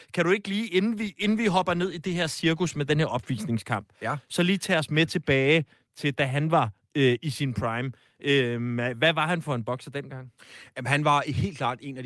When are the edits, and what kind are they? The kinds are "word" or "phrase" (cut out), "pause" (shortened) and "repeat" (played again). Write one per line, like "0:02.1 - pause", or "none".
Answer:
none